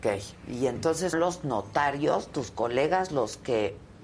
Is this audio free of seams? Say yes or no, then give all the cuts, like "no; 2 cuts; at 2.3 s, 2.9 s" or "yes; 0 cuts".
no; 1 cut; at 1.1 s